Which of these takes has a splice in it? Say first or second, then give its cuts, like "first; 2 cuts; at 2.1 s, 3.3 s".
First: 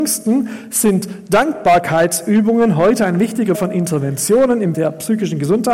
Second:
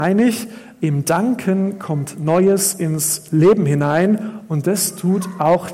first; 2 cuts; at 3.5 s, 4.7 s